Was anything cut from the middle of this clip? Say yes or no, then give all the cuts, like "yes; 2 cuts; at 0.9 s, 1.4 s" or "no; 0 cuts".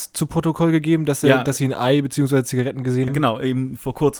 yes; 1 cut; at 3.1 s